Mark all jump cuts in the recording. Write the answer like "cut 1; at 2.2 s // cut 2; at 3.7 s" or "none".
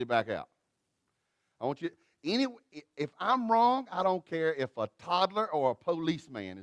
none